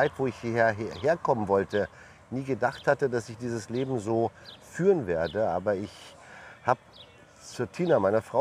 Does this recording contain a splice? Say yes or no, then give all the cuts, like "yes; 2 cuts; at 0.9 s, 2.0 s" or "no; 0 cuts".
no; 0 cuts